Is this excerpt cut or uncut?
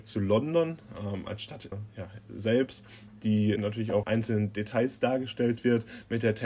cut